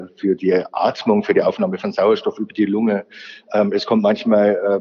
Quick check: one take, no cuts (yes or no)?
yes